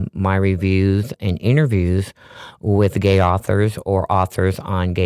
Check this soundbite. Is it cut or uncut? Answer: uncut